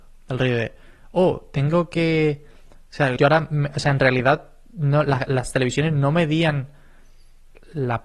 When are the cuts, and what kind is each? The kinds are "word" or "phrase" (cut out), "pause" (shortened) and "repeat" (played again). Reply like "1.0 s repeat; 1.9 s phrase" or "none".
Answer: 3.2 s word